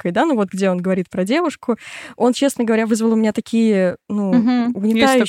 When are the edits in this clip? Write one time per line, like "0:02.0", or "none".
none